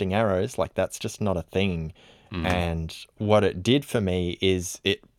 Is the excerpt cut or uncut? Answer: uncut